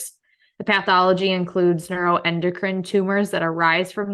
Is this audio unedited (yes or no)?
yes